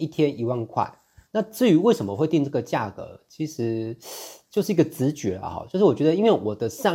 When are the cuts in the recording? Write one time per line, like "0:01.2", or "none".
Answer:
none